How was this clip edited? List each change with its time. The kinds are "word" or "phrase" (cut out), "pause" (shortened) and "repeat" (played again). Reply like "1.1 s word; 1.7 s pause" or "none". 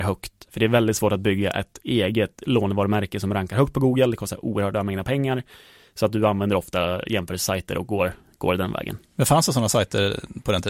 none